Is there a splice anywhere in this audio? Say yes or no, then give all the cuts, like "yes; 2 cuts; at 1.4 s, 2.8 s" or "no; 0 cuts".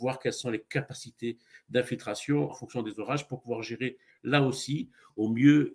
yes; 1 cut; at 2.5 s